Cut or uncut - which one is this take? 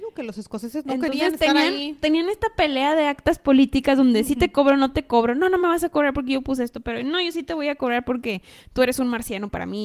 uncut